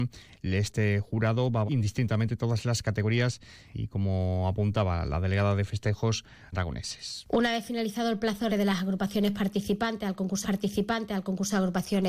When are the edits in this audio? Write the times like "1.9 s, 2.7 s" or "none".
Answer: 1.7 s, 3.7 s, 6.5 s, 8.5 s, 10.4 s